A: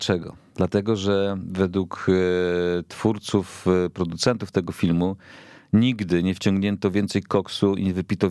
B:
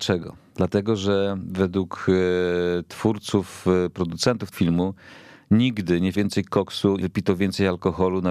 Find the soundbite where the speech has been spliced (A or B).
B